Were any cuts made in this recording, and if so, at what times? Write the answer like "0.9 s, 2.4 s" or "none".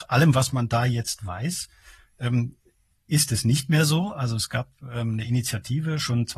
none

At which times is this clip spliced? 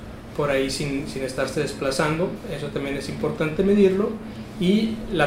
none

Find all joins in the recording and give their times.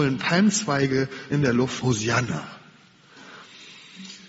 1.3 s, 1.8 s

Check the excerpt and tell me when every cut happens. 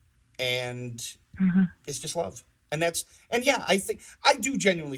none

